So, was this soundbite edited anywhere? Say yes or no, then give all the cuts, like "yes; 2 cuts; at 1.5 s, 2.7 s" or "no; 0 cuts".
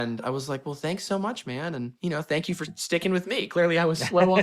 no; 0 cuts